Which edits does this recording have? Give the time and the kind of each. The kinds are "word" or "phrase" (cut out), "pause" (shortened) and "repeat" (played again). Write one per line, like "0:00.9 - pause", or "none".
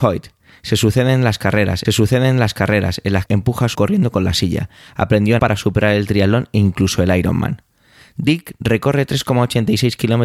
0:01.8 - repeat
0:03.3 - word
0:03.7 - word
0:05.4 - word